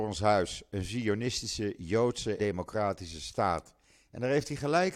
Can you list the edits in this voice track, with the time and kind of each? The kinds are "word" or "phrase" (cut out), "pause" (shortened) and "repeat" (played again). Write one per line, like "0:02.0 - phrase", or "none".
0:02.4 - word